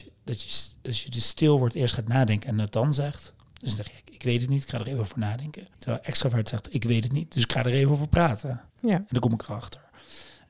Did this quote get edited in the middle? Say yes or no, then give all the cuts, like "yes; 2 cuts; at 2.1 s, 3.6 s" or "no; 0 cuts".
yes; 2 cuts; at 5.7 s, 8.7 s